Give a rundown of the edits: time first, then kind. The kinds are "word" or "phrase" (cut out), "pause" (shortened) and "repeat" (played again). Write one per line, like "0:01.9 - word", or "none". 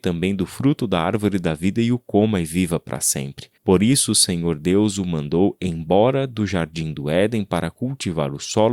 0:03.6 - pause